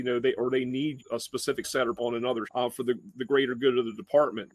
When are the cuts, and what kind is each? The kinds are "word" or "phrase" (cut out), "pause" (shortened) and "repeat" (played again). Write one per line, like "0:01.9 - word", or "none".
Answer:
0:01.0 - word
0:01.6 - word
0:02.0 - word
0:02.4 - word